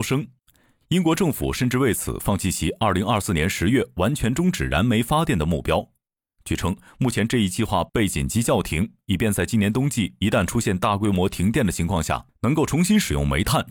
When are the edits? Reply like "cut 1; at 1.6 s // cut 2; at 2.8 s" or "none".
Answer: none